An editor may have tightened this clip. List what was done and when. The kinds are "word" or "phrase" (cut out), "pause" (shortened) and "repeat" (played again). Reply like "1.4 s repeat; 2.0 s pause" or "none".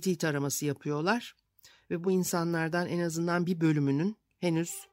none